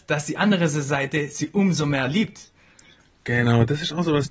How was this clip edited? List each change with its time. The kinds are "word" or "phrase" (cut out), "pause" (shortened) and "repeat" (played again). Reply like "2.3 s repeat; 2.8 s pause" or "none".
none

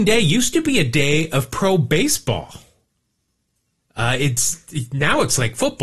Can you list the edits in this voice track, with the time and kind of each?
none

